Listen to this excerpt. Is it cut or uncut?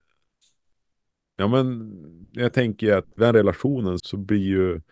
cut